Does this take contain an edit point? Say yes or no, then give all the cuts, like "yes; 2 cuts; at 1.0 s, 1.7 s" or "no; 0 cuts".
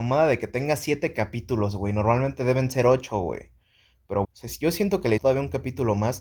yes; 2 cuts; at 4.2 s, 5.2 s